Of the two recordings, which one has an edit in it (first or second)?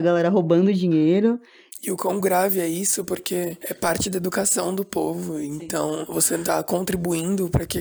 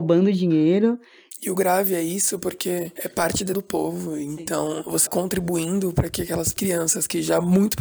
second